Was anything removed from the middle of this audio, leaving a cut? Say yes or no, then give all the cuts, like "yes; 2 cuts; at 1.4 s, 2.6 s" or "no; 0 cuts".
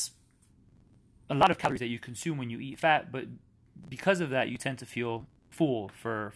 no; 0 cuts